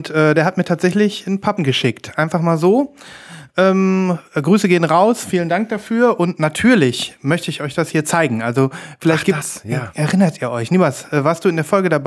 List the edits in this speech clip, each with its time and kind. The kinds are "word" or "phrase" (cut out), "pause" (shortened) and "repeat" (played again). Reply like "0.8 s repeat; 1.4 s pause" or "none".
1.6 s word